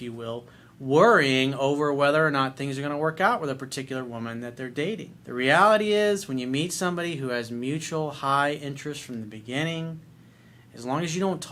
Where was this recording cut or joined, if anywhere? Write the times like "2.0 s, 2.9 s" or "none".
5.2 s